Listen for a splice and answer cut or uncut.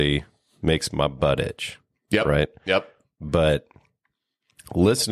uncut